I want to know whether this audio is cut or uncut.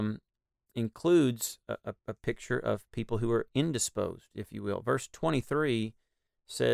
cut